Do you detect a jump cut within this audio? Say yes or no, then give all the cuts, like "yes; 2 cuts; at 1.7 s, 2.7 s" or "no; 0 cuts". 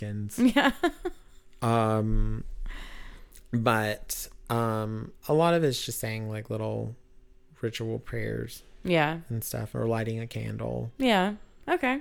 no; 0 cuts